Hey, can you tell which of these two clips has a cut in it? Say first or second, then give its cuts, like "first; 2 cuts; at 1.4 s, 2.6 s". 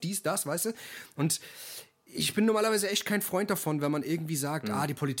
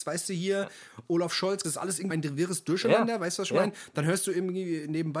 second; 2 cuts; at 1.6 s, 2.1 s